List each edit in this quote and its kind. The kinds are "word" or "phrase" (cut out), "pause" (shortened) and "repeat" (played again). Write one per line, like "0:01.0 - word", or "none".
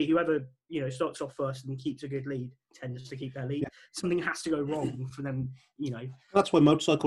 none